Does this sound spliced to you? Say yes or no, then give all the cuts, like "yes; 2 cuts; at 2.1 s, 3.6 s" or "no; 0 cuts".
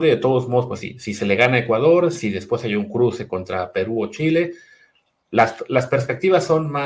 no; 0 cuts